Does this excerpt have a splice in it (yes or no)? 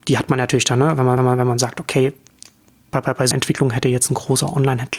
yes